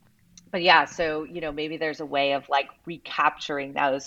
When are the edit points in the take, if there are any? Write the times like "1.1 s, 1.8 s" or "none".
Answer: none